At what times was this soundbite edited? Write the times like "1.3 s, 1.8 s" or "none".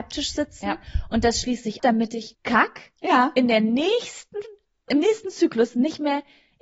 1.8 s, 2.4 s, 4.9 s